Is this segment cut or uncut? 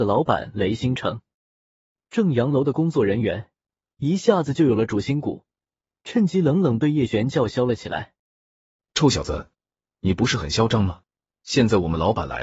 uncut